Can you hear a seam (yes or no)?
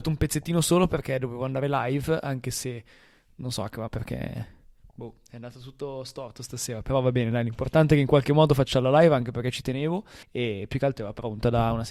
yes